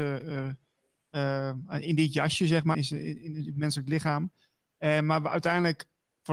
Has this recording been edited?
yes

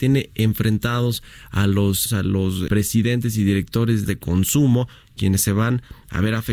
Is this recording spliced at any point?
yes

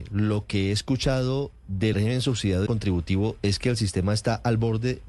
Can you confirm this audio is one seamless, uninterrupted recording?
no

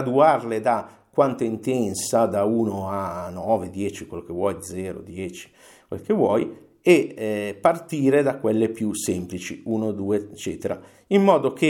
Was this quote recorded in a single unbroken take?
yes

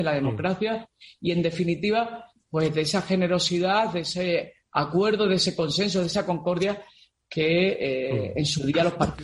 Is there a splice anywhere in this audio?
no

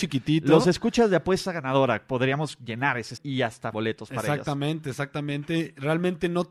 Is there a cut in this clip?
yes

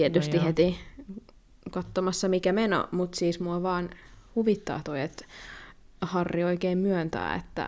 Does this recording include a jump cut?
no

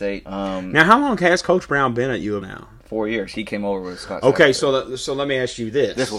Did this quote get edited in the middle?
yes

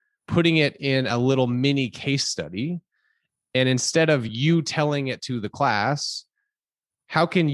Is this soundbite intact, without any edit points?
yes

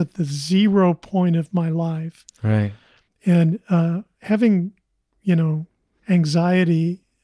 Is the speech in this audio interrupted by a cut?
no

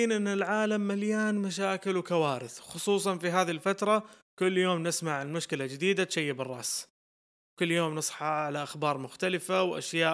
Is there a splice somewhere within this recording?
no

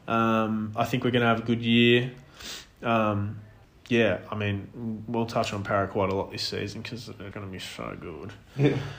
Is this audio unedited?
no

